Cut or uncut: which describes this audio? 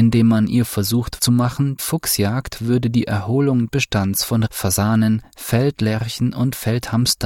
cut